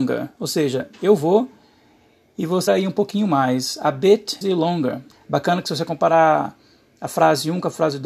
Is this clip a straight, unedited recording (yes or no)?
no